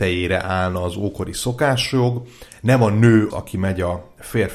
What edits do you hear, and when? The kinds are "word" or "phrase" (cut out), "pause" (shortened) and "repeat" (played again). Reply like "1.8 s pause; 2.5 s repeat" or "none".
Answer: 3.3 s word